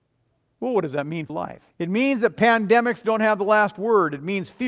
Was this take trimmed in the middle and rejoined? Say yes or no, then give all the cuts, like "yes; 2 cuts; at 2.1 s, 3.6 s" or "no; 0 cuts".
yes; 2 cuts; at 1.3 s, 1.7 s